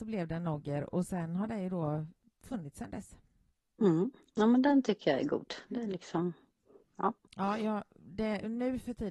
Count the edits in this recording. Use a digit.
2